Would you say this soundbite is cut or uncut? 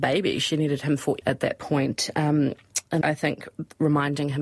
cut